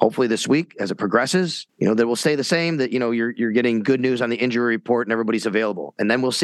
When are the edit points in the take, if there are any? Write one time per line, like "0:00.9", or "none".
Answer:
0:01.7